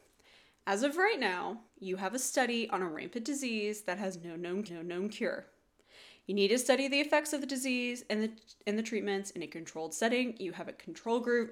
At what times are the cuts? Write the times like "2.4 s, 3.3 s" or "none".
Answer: 1.7 s, 4.7 s